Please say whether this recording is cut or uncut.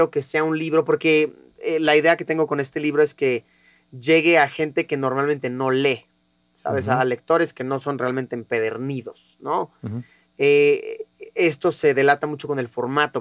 uncut